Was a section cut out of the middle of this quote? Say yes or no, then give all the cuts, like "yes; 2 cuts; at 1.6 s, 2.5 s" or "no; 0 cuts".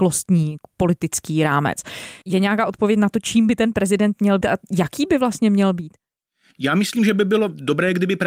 yes; 2 cuts; at 2.2 s, 4.4 s